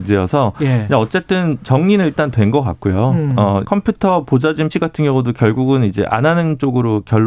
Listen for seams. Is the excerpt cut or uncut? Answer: cut